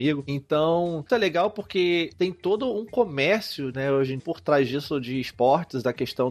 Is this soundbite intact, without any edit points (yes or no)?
no